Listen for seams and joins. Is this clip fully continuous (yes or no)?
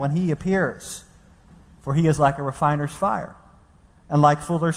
yes